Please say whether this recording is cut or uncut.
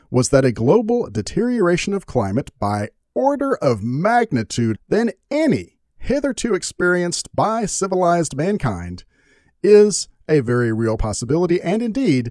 cut